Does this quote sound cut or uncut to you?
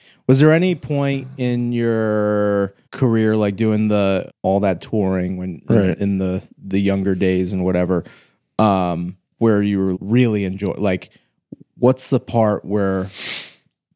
cut